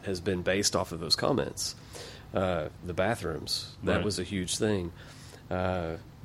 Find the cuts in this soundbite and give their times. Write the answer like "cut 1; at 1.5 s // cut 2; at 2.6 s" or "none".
none